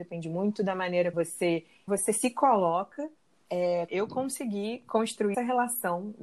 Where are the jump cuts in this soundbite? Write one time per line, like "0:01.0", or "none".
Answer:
0:01.1
0:01.9
0:03.9
0:05.3